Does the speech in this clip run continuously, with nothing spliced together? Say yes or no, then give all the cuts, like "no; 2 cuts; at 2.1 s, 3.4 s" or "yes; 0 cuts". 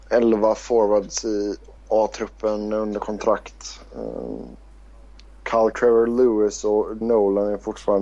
no; 3 cuts; at 1.8 s, 5.7 s, 7.0 s